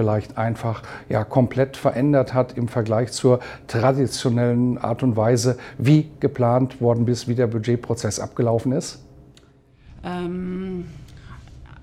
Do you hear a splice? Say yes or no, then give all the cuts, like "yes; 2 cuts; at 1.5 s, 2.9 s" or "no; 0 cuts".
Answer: no; 0 cuts